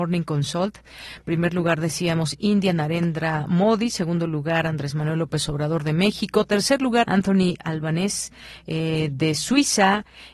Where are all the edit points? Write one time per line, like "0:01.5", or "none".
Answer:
0:07.0